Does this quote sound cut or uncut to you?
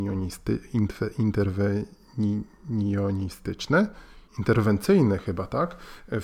cut